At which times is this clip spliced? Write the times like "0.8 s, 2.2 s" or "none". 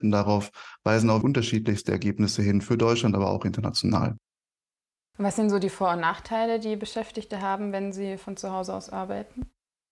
1.2 s